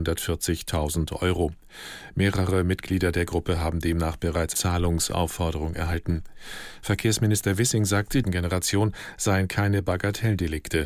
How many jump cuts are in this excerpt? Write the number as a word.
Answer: two